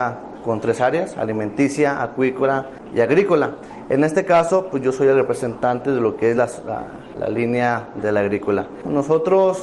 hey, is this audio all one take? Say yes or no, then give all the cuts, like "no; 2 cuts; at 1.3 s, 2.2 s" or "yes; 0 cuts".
yes; 0 cuts